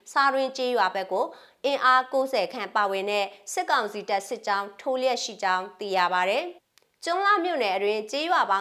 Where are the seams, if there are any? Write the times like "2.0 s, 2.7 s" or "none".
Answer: 6.6 s

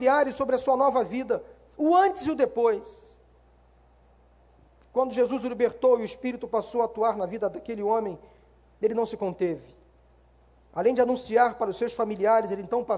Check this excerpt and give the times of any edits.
none

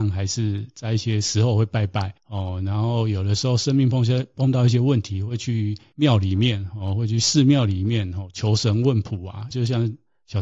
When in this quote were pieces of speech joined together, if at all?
2.2 s, 9.5 s

